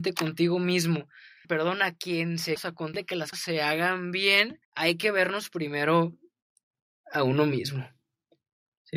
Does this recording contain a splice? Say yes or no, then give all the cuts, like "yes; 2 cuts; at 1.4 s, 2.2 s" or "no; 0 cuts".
yes; 5 cuts; at 1.4 s, 2.6 s, 2.9 s, 3.3 s, 4.6 s